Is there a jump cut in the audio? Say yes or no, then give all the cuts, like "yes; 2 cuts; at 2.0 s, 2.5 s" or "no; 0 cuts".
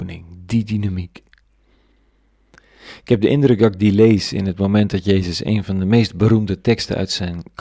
no; 0 cuts